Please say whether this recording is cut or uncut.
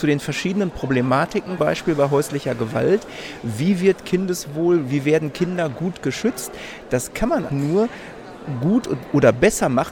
cut